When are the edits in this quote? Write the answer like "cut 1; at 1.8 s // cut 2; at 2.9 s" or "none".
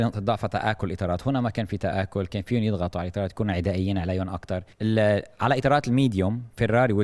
cut 1; at 4.7 s